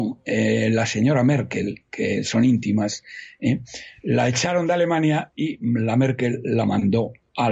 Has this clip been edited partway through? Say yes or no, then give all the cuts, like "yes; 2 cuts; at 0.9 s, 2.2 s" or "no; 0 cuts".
no; 0 cuts